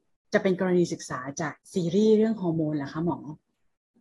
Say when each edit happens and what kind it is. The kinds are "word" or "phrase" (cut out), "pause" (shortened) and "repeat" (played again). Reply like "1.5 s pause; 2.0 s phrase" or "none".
1.6 s pause